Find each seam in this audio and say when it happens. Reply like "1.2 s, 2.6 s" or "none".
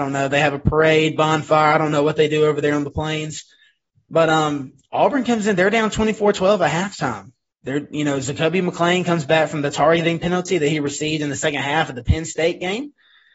none